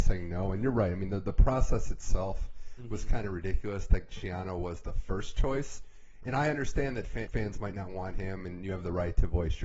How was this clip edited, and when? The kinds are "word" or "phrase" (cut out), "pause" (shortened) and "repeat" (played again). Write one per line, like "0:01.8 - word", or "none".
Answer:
0:07.3 - word